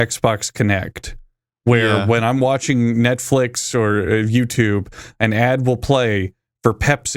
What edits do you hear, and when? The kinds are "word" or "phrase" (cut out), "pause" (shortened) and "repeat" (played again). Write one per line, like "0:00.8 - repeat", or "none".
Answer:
none